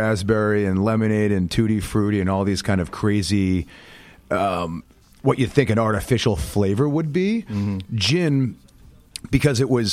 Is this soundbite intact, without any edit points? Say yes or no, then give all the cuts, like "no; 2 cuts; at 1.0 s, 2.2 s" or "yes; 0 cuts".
yes; 0 cuts